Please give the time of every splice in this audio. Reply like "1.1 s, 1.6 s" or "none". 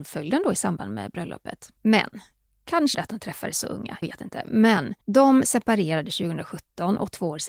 1.8 s, 2.9 s, 4.0 s, 5.0 s